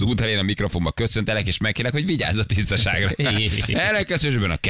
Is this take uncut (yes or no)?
yes